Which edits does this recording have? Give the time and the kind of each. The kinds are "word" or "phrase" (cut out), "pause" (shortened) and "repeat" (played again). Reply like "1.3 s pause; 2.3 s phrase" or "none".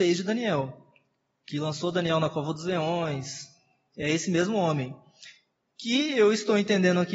none